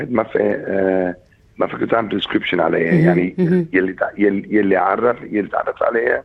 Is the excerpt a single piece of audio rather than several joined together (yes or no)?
yes